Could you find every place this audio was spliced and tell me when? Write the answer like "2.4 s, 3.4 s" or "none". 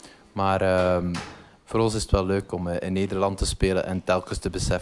none